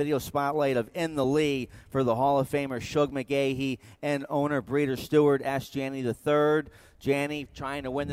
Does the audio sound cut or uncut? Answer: uncut